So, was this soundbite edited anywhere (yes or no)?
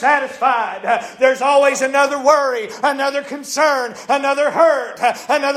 no